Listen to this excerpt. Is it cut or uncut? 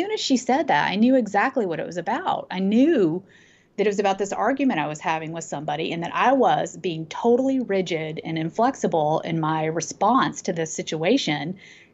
uncut